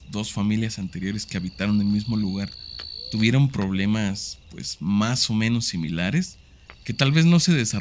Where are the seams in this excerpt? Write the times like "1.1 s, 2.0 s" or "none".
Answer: none